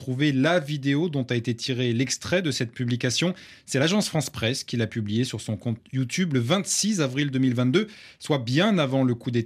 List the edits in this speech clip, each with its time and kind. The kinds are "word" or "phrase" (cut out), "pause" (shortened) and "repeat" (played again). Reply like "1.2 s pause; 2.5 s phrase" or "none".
none